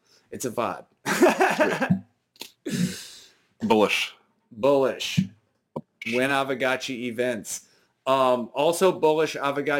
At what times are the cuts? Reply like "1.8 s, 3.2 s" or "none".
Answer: none